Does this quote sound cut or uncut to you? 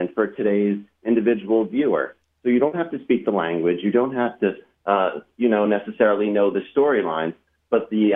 uncut